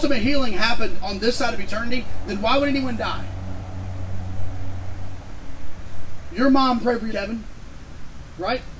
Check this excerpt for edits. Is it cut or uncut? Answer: cut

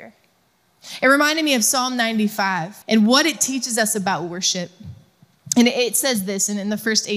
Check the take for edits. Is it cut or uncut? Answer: cut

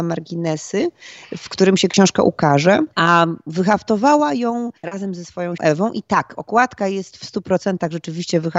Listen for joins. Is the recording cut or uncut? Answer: cut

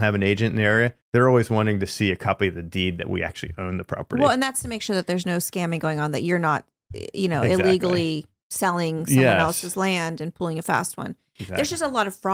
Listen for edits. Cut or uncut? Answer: cut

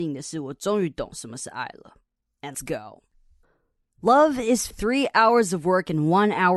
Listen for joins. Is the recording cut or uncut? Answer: cut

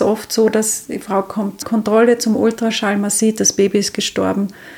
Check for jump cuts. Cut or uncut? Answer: cut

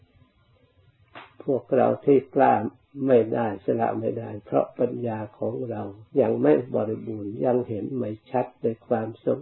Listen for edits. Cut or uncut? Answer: cut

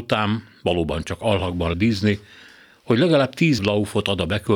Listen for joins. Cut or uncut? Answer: cut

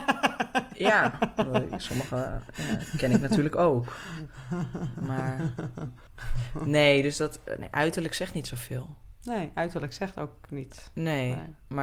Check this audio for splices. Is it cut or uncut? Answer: uncut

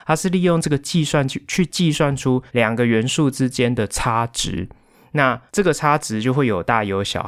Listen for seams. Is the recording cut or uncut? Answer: cut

